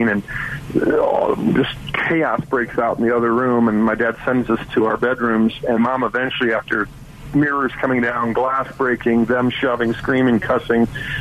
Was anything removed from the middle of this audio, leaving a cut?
yes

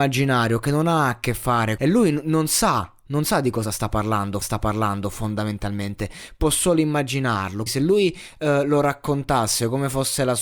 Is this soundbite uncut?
no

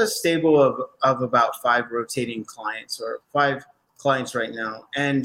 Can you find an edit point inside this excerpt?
yes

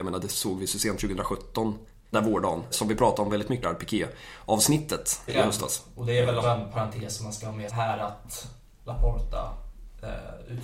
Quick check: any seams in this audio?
yes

